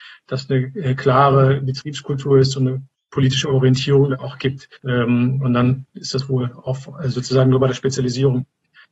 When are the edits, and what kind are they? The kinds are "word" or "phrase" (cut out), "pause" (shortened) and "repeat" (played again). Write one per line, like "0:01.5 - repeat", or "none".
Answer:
0:02.9 - pause
0:04.8 - pause